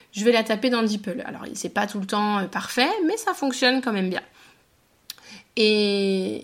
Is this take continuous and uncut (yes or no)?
yes